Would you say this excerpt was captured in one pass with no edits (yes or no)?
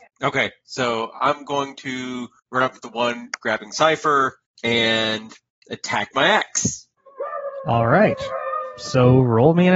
no